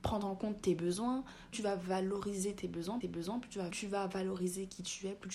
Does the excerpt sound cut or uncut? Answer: cut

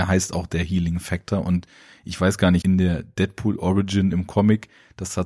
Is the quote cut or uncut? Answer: cut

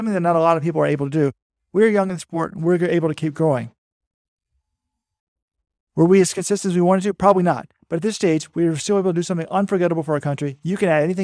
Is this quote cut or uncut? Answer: uncut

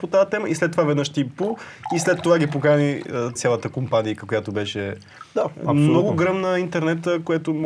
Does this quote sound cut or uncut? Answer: cut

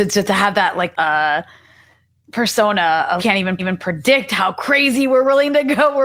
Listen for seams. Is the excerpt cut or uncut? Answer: cut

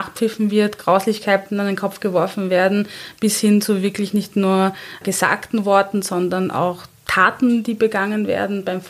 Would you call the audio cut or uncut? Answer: cut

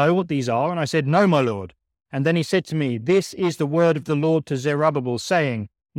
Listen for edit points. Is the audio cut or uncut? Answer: uncut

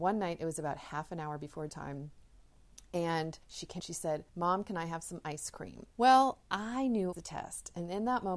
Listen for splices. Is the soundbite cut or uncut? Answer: cut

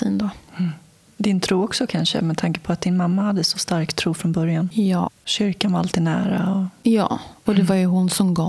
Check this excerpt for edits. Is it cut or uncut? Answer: uncut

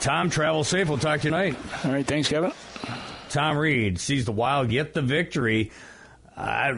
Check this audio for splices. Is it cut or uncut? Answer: cut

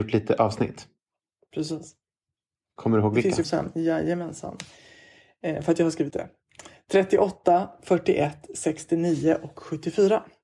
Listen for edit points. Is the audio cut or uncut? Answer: cut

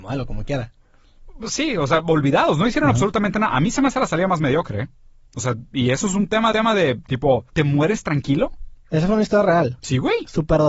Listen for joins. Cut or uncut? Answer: cut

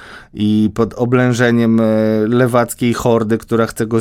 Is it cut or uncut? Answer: uncut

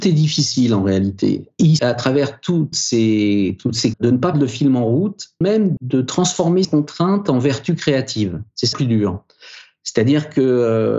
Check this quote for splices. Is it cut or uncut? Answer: cut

